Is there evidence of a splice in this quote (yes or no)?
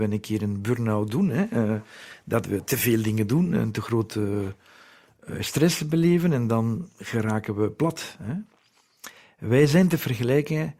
no